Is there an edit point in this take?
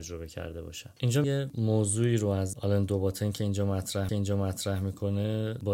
yes; 2 cuts; at 1.2 s, 4.1 s

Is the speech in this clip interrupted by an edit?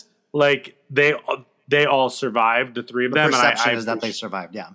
no; 0 cuts

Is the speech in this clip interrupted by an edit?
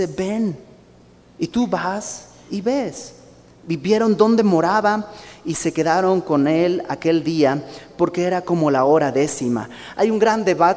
no; 0 cuts

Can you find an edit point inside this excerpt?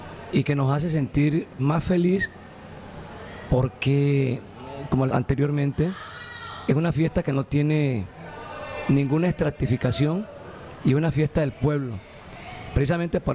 yes; 2 cuts; at 1.6 s, 5.1 s

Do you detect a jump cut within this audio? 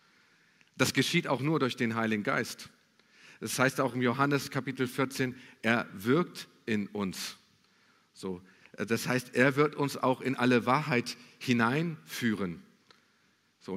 no; 0 cuts

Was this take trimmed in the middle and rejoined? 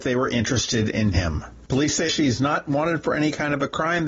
yes; 2 cuts; at 1.1 s, 2.1 s

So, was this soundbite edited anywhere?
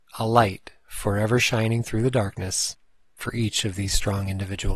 no; 0 cuts

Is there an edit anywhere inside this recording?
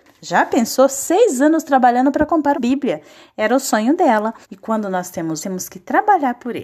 yes; 3 cuts; at 2.5 s, 4.4 s, 5.4 s

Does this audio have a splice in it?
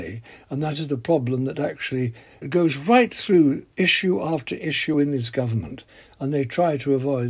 no; 0 cuts

